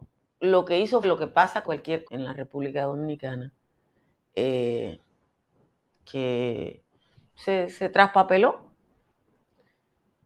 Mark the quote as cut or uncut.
cut